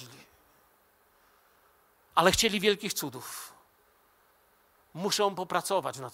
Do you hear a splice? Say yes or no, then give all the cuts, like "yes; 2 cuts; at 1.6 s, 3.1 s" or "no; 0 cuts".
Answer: no; 0 cuts